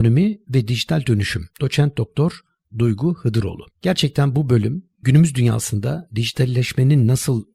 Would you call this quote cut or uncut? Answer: cut